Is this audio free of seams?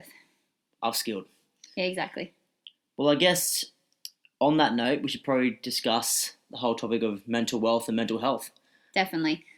yes; 0 cuts

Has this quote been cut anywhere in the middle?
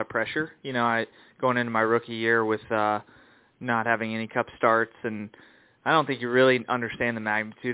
no; 0 cuts

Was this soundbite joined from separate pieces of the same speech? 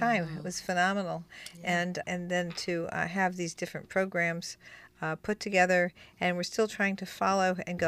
yes; 1 cut; at 2.0 s

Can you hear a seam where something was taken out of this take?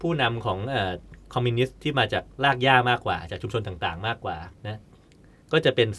yes; 2 cuts; at 2.3 s, 4.6 s

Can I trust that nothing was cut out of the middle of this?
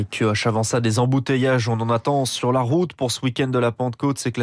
yes; 0 cuts

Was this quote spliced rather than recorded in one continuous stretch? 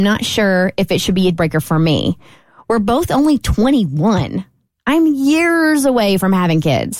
yes; 1 cut; at 1.3 s

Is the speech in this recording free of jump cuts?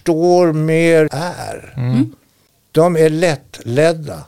no; 1 cut; at 1.1 s

